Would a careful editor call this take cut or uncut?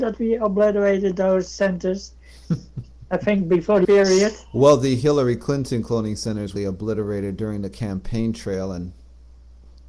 cut